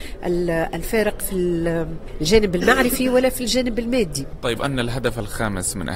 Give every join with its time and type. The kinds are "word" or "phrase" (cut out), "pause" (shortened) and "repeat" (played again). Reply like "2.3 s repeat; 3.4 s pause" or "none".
1.2 s word; 4.6 s word

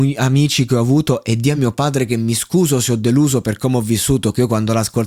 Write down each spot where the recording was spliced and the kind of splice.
none

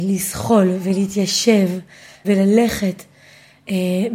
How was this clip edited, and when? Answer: 2.2 s word

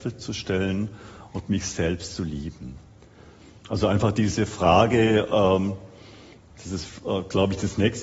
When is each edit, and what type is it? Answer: none

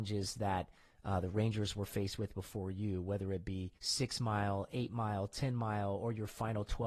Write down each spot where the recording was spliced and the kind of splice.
3.8 s pause

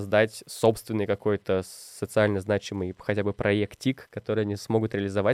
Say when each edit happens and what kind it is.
none

